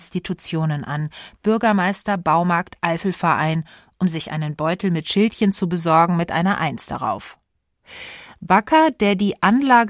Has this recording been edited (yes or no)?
no